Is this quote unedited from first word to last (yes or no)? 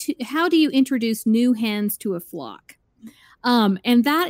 yes